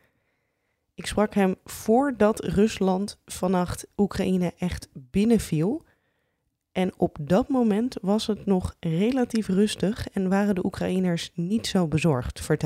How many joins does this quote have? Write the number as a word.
zero